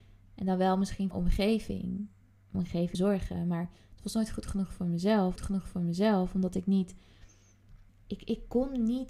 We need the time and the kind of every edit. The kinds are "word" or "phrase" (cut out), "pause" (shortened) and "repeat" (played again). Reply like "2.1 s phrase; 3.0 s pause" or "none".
1.1 s phrase; 2.5 s word; 2.9 s phrase; 5.4 s repeat; 7.9 s pause